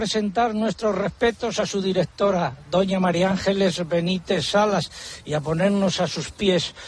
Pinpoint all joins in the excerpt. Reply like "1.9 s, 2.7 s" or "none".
none